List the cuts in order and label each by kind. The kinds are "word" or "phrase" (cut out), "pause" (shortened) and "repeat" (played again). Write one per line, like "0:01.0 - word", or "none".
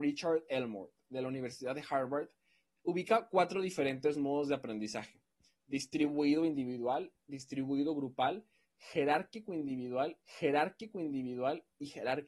0:10.2 - repeat